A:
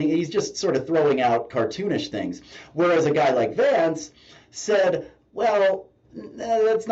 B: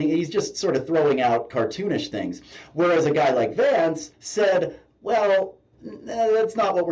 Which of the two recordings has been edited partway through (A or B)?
B